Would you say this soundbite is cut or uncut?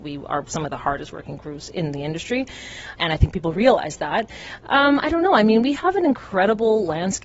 cut